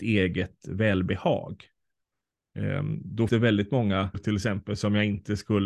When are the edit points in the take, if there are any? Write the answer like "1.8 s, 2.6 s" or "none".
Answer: 3.3 s, 4.1 s

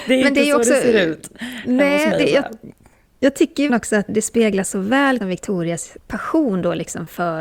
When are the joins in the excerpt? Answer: 2.2 s, 3.7 s, 4.1 s, 5.2 s, 6.0 s

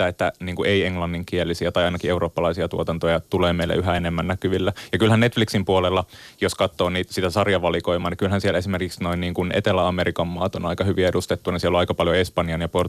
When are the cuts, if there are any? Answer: none

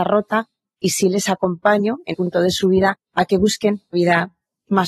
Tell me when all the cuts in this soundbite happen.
2.1 s, 3.1 s, 3.9 s

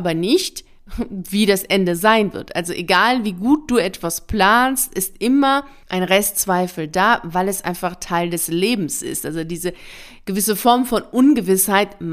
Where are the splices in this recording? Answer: none

